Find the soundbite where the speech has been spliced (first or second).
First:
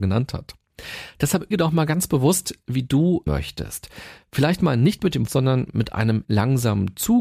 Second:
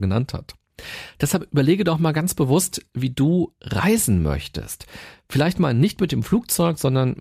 first